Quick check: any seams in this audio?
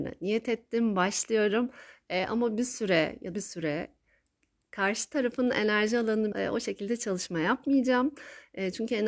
yes; 2 cuts; at 3.3 s, 6.3 s

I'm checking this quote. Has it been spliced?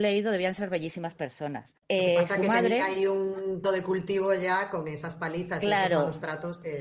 yes; 2 cuts; at 1.8 s, 3.6 s

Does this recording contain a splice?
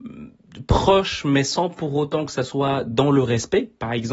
no; 0 cuts

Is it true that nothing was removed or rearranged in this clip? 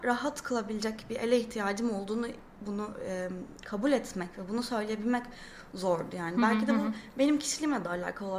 yes; 0 cuts

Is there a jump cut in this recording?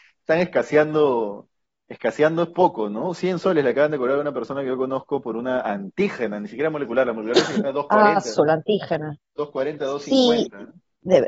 no; 0 cuts

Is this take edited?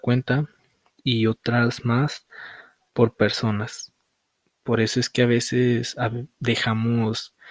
no; 0 cuts

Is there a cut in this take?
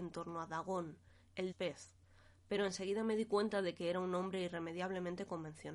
yes; 1 cut; at 1.5 s

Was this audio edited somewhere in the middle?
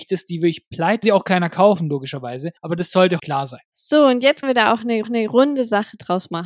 yes; 6 cuts; at 1.0 s, 2.6 s, 3.2 s, 3.7 s, 4.4 s, 5.0 s

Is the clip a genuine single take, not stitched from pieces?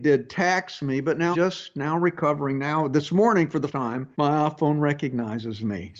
no; 3 cuts; at 1.3 s, 3.7 s, 4.1 s

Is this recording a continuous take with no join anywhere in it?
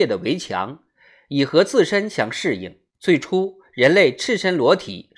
no; 1 cut; at 2.9 s

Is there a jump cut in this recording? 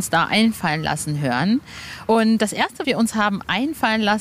yes; 1 cut; at 2.8 s

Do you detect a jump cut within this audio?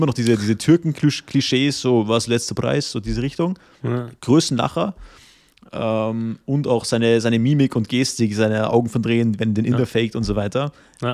no; 0 cuts

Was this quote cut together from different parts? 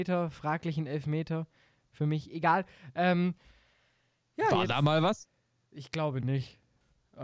no; 0 cuts

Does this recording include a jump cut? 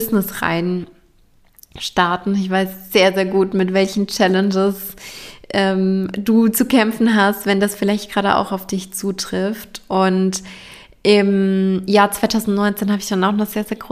no; 0 cuts

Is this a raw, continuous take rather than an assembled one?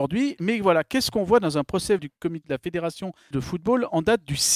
no; 3 cuts; at 2.0 s, 2.4 s, 3.3 s

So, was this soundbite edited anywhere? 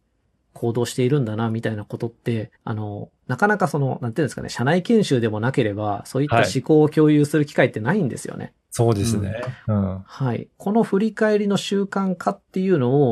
yes; 1 cut; at 2.6 s

